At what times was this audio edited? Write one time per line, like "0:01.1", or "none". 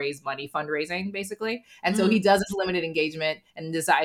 none